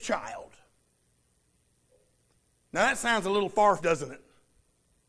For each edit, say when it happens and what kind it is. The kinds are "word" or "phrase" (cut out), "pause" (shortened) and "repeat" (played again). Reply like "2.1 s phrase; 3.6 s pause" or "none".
3.8 s word